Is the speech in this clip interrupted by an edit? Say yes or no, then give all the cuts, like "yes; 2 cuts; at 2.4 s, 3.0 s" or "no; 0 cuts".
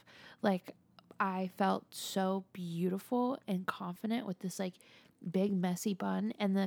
no; 0 cuts